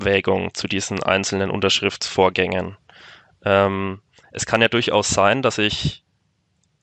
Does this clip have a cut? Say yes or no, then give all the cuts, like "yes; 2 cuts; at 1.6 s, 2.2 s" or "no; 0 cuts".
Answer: no; 0 cuts